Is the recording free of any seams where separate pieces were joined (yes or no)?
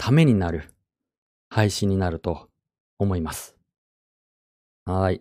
yes